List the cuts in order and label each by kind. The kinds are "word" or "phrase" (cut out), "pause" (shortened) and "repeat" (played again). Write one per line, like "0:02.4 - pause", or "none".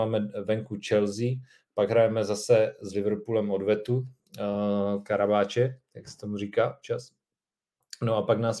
none